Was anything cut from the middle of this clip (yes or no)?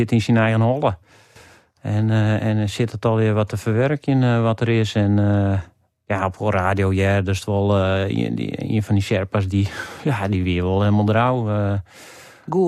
no